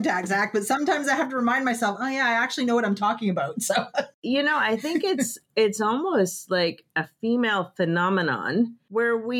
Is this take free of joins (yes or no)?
yes